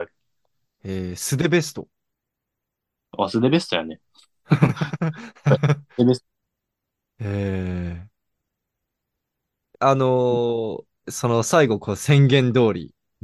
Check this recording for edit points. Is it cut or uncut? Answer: cut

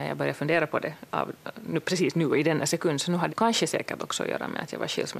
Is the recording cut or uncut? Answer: cut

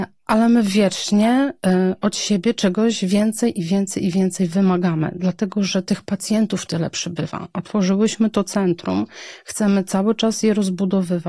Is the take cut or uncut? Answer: uncut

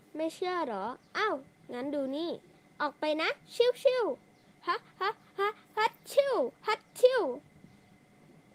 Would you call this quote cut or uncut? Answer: cut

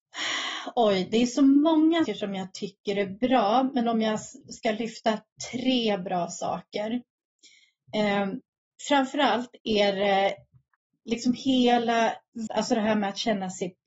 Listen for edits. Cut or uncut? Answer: cut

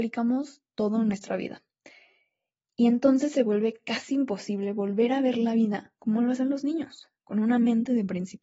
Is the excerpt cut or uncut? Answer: uncut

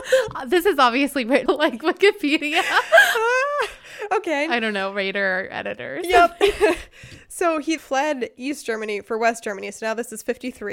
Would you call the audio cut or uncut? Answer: cut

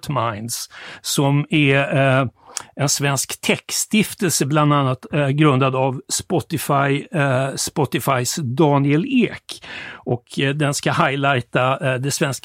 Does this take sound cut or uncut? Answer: uncut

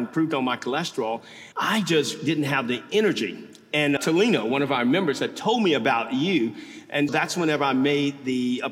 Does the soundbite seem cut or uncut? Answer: cut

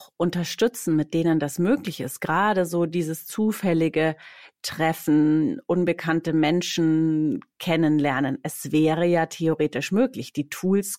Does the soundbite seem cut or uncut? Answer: uncut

